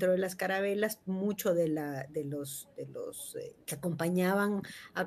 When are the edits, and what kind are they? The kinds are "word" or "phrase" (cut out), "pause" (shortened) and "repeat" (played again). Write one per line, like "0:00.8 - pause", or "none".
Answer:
0:03.6 - pause